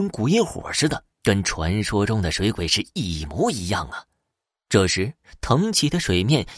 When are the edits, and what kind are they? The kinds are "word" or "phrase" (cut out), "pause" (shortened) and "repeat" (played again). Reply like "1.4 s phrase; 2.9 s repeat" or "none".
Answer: 1.1 s pause